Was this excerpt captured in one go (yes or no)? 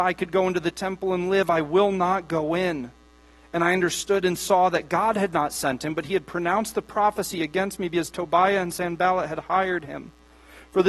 yes